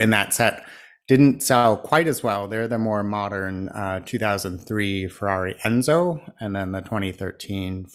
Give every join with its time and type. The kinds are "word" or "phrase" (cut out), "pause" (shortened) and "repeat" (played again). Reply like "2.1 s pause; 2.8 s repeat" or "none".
none